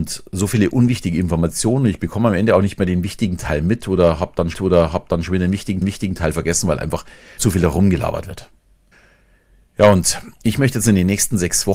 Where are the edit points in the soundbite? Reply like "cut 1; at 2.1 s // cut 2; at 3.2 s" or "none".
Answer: cut 1; at 4.5 s // cut 2; at 5.8 s // cut 3; at 7.4 s // cut 4; at 8.9 s